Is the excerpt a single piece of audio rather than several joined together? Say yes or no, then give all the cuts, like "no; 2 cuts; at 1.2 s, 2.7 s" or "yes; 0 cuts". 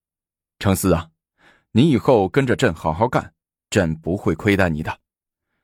yes; 0 cuts